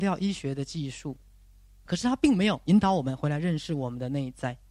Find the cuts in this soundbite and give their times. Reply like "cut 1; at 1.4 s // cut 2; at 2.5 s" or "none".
cut 1; at 1.9 s // cut 2; at 2.6 s